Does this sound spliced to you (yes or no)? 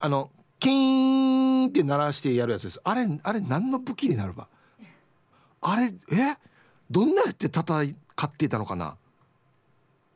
no